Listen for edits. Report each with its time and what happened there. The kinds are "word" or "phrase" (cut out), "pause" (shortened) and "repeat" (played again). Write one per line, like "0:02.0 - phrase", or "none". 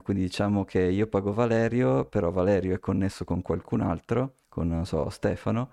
0:04.4 - pause